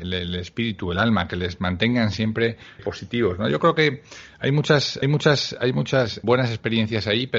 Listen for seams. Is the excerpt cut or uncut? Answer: cut